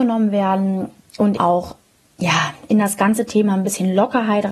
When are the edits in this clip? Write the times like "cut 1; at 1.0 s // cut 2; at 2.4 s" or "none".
cut 1; at 1.4 s

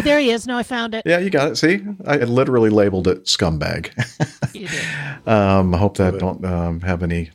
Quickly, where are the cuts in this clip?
cut 1; at 2.2 s // cut 2; at 4.6 s // cut 3; at 6.2 s

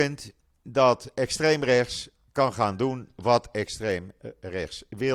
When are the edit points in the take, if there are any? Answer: none

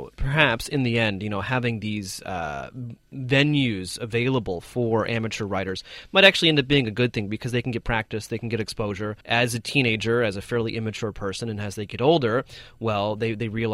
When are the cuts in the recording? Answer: cut 1; at 9.2 s

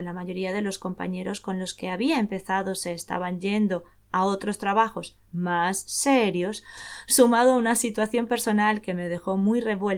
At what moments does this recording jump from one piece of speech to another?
cut 1; at 5.3 s

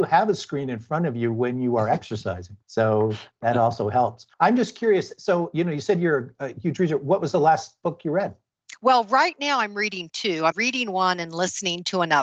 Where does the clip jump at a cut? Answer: cut 1; at 2.6 s // cut 2; at 4.3 s // cut 3; at 10.5 s

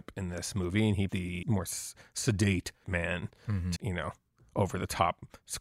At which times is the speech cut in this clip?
cut 1; at 1.1 s // cut 2; at 1.4 s // cut 3; at 2.8 s // cut 4; at 3.8 s

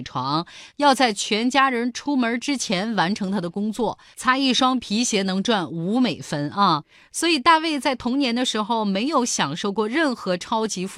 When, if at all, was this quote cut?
none

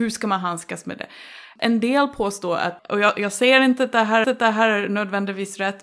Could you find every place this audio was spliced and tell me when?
cut 1; at 4.2 s

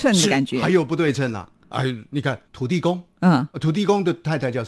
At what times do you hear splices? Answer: cut 1; at 2.4 s

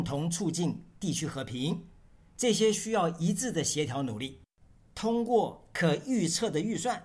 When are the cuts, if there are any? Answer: none

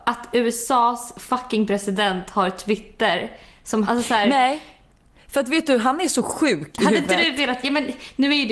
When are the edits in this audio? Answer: cut 1; at 3.8 s

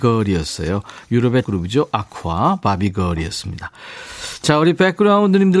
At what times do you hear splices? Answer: cut 1; at 1.4 s

